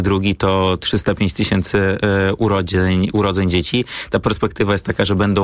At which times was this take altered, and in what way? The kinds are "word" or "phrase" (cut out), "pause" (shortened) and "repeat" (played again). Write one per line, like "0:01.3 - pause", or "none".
none